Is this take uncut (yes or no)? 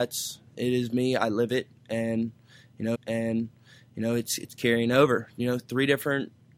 no